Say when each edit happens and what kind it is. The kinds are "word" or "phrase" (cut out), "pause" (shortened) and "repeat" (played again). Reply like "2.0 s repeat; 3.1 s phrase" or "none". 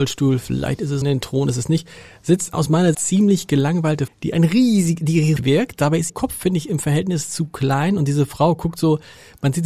1.0 s word; 2.5 s word; 2.9 s word; 4.1 s word; 5.4 s word; 6.1 s word